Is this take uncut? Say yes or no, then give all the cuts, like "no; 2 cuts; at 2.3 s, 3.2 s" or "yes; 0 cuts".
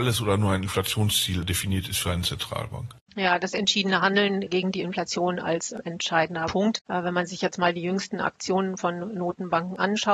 no; 1 cut; at 3.0 s